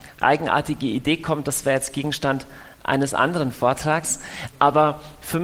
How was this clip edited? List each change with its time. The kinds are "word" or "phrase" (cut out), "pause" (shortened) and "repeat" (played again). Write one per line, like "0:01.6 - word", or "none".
none